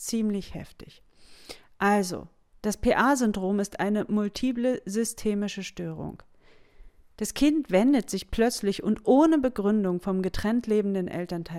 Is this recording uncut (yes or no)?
yes